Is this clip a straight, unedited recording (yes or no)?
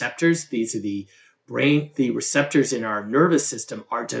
yes